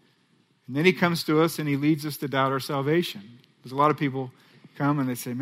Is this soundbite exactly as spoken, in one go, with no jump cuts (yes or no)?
yes